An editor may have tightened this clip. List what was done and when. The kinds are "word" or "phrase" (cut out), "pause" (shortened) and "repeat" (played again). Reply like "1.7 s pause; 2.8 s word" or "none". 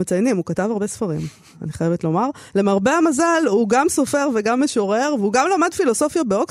none